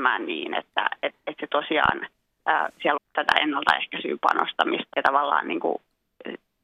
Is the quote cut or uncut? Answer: cut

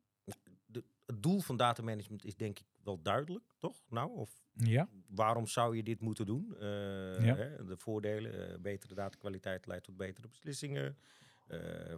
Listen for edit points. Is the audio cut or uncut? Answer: uncut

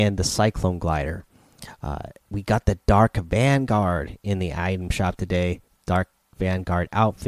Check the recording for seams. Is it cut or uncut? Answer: uncut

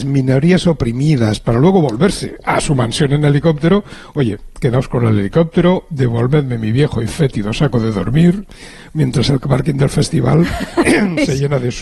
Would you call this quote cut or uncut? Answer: uncut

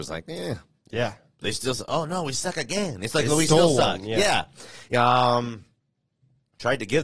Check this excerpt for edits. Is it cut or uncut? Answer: uncut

